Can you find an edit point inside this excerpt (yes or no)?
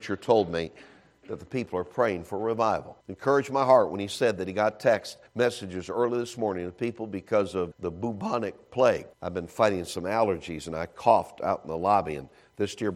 yes